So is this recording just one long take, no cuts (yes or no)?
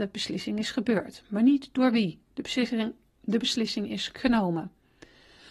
no